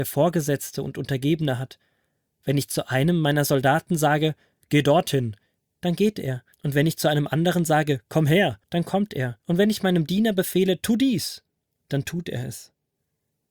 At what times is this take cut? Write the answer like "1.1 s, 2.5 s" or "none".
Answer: 6.5 s, 8.6 s, 9.4 s